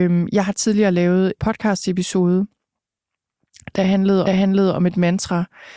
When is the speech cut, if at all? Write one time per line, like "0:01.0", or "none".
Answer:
0:01.4
0:04.3